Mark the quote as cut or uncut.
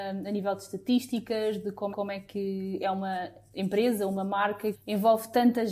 cut